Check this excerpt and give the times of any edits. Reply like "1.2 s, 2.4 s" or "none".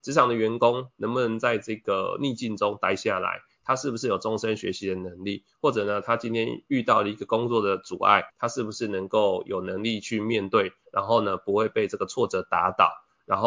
8.3 s